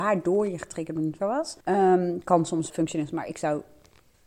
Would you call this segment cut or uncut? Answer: cut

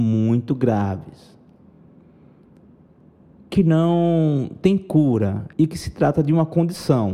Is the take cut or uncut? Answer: cut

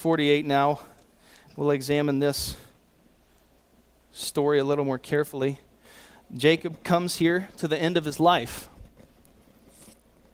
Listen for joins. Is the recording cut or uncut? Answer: uncut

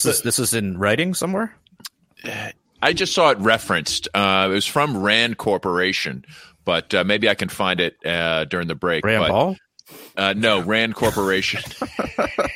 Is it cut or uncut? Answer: uncut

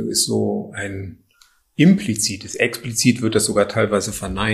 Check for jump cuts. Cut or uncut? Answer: uncut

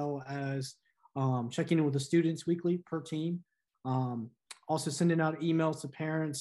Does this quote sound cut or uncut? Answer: uncut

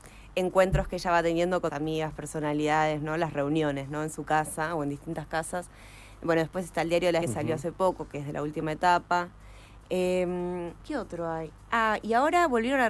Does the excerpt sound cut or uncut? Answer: cut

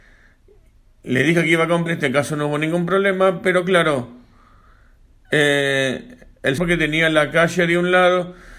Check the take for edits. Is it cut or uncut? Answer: cut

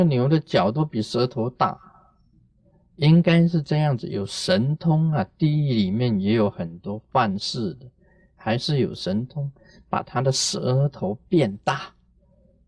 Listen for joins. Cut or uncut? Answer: uncut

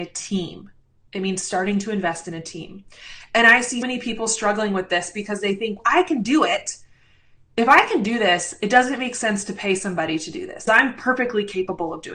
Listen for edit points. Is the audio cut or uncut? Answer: cut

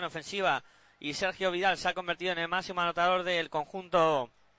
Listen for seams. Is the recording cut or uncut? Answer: uncut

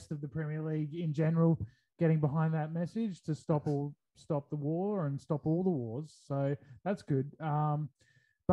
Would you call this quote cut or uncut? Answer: uncut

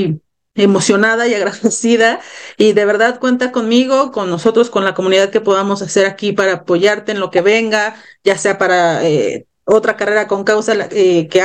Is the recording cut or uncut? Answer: uncut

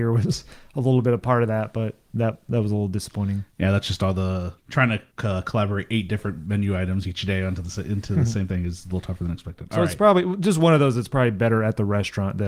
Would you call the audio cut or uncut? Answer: cut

